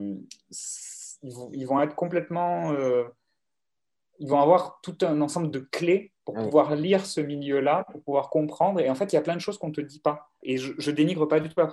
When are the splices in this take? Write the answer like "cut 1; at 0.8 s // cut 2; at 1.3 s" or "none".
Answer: none

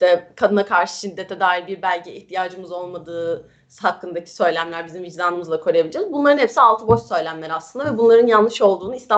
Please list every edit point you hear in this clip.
none

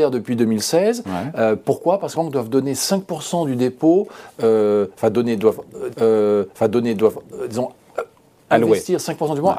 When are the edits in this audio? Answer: cut 1; at 2.1 s // cut 2; at 5.9 s

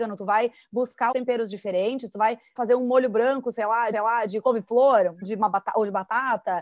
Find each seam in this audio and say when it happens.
cut 1; at 1.1 s // cut 2; at 2.6 s // cut 3; at 3.9 s // cut 4; at 5.2 s

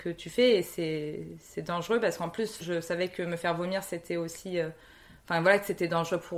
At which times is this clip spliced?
none

